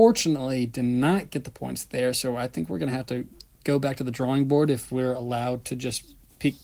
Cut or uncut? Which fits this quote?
uncut